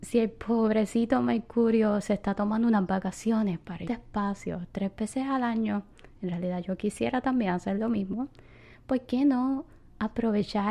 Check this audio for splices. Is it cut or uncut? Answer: cut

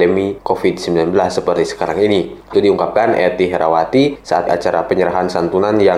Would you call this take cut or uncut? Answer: cut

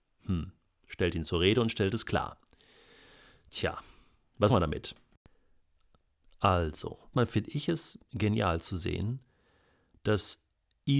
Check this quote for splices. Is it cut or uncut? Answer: cut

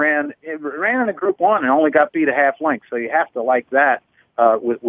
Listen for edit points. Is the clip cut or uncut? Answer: uncut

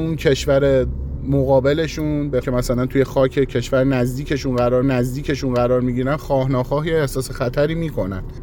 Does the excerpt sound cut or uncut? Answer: cut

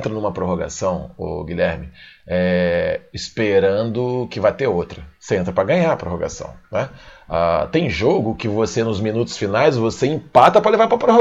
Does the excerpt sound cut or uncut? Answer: uncut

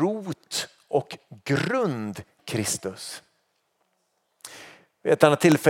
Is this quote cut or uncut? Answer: cut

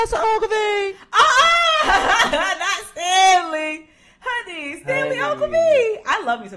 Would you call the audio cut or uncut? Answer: uncut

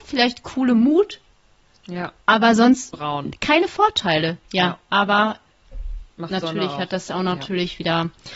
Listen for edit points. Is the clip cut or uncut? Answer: cut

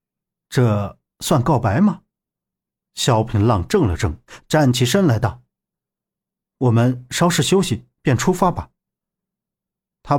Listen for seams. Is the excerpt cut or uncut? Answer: uncut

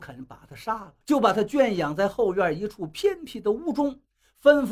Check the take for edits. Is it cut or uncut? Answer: cut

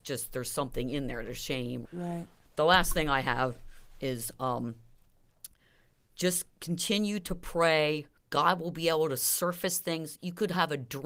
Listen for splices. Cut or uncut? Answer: cut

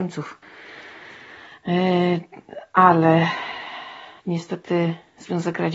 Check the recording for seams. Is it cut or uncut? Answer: cut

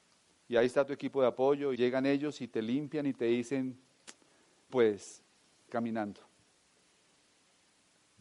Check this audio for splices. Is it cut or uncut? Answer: cut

